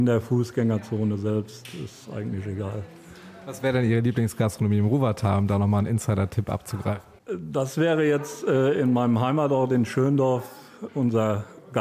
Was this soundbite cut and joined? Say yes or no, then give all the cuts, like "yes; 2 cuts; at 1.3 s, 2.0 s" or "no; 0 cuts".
no; 0 cuts